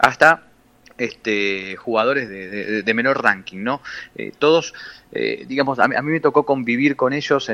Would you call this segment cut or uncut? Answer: cut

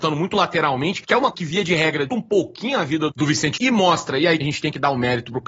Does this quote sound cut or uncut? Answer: cut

